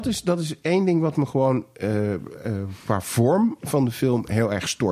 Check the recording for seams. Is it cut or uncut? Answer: uncut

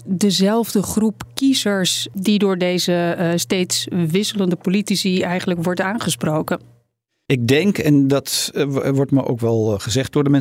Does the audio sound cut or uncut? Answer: uncut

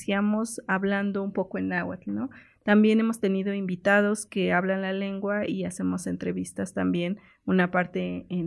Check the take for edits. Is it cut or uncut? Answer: uncut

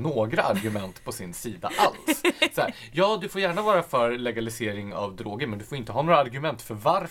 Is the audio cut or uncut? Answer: uncut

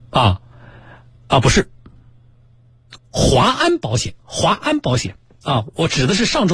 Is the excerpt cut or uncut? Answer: cut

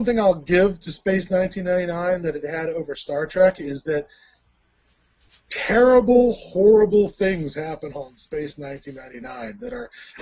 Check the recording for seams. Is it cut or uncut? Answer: uncut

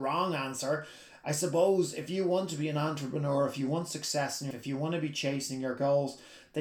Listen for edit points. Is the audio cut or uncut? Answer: cut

